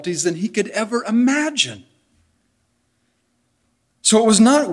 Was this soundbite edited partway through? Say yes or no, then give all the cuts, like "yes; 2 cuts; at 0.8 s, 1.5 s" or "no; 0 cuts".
no; 0 cuts